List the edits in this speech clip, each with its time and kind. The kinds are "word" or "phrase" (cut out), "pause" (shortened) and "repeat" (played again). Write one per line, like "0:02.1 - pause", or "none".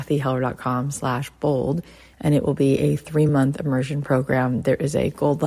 none